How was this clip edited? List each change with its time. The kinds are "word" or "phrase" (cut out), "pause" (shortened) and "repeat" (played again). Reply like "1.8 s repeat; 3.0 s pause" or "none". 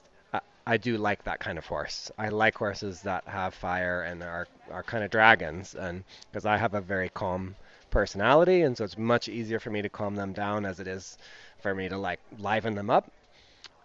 none